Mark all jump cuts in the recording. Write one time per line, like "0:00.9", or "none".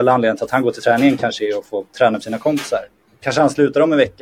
0:03.1